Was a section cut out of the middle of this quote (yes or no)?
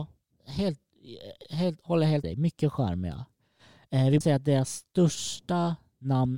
yes